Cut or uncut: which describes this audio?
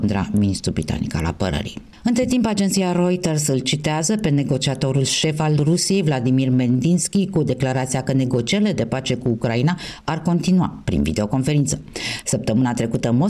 uncut